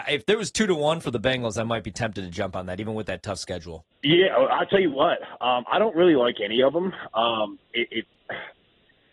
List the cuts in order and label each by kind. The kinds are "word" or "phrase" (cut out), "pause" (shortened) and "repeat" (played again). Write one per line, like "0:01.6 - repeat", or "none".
0:03.9 - pause